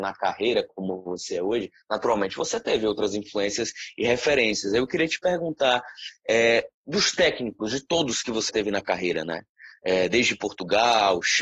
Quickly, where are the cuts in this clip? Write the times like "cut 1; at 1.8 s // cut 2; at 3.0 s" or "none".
cut 1; at 6.7 s // cut 2; at 8.5 s